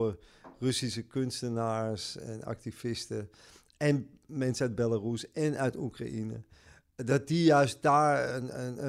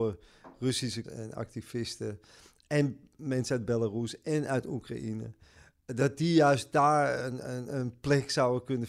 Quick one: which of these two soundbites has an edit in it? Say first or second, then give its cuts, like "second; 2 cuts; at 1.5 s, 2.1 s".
second; 1 cut; at 1.0 s